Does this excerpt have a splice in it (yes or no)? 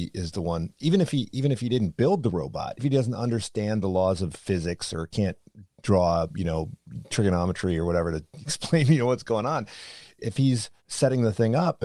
yes